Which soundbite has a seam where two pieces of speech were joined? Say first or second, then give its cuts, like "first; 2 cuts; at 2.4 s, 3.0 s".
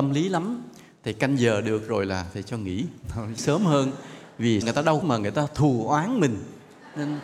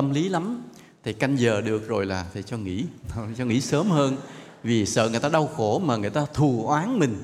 first; 3 cuts; at 3.4 s, 4.6 s, 5.0 s